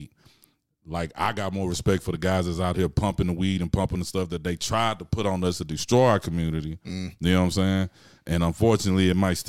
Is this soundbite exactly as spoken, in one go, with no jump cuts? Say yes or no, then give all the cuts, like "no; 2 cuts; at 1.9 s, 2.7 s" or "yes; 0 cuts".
yes; 0 cuts